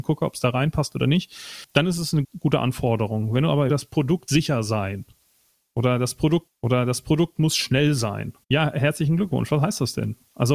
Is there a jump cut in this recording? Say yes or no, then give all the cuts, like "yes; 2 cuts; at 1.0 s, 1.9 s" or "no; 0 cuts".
yes; 5 cuts; at 2.2 s, 3.7 s, 4.3 s, 6.5 s, 8.4 s